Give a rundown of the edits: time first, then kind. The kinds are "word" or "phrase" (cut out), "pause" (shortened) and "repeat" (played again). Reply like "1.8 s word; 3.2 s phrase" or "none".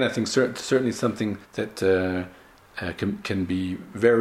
1.4 s pause

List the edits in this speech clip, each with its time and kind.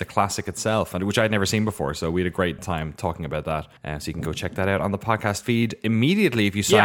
2.6 s word; 3.8 s pause

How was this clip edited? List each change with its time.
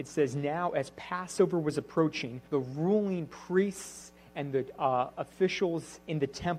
2.5 s pause

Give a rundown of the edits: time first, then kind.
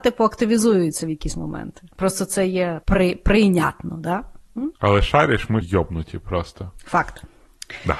1.9 s pause; 2.8 s word; 4.8 s pause; 5.6 s word

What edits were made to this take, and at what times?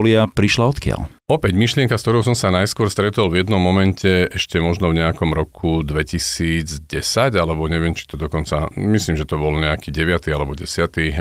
1.2 s pause

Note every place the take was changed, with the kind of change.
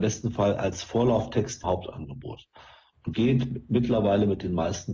1.6 s word; 3.1 s word

